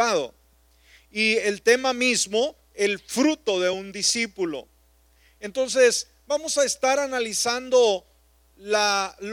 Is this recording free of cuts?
yes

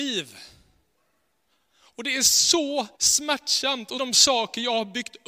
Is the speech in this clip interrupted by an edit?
yes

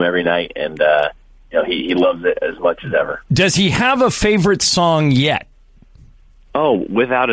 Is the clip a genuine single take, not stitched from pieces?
yes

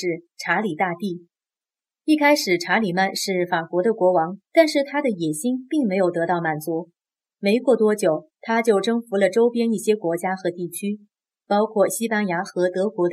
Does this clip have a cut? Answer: yes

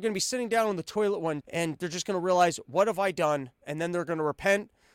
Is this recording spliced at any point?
yes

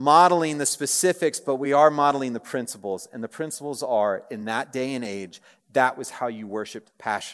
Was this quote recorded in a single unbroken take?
yes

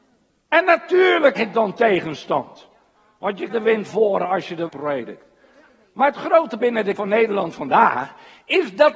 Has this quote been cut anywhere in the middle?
yes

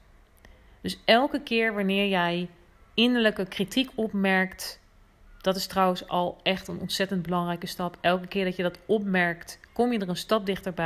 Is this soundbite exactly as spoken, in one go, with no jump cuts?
yes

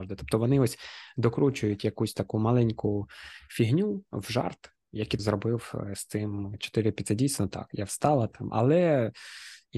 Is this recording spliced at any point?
yes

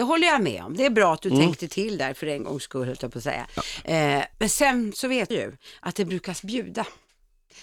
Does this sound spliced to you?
yes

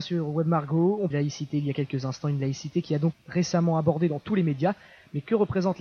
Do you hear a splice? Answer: yes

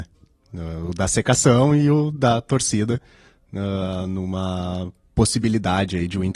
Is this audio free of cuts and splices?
yes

